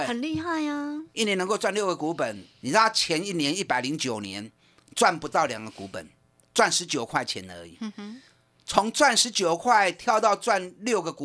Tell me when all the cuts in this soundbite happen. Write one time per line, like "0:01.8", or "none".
0:01.1
0:02.5